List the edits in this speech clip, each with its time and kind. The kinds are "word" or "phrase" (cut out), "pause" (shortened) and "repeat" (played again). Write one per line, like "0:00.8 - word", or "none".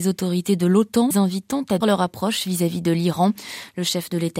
0:01.1 - word
0:01.8 - word